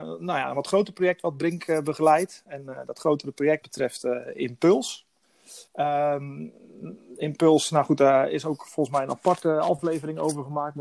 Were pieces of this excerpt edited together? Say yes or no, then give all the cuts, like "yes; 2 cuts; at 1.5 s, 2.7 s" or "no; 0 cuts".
yes; 2 cuts; at 3.6 s, 5.7 s